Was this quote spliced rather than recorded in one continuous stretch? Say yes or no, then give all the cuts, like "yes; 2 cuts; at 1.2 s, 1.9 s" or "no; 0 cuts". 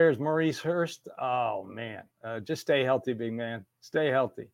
yes; 1 cut; at 2.1 s